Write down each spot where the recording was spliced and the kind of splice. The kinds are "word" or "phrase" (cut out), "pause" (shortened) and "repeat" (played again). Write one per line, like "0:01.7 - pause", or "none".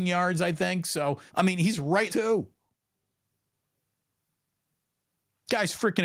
0:01.3 - pause
0:02.1 - phrase